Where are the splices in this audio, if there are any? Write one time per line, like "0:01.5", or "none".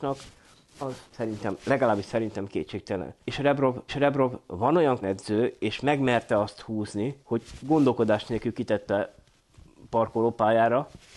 0:01.0
0:03.2
0:03.9
0:05.0
0:07.2